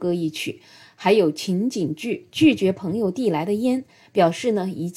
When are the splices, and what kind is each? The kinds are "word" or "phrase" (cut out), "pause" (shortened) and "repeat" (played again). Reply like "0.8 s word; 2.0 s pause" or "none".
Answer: none